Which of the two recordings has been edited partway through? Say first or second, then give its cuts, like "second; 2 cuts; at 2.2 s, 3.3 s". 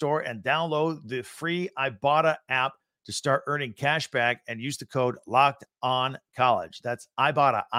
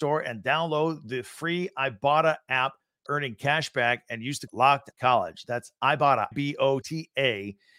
second; 5 cuts; at 3.1 s, 4.5 s, 4.9 s, 6.3 s, 6.8 s